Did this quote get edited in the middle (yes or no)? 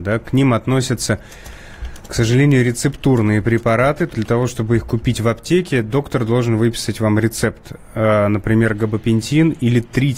yes